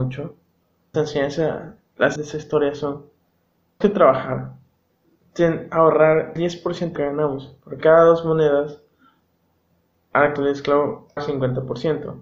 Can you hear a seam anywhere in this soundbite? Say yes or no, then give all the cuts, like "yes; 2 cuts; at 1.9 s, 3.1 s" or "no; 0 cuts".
yes; 8 cuts; at 0.9 s, 2.2 s, 3.8 s, 6.4 s, 7.0 s, 7.8 s, 10.4 s, 11.2 s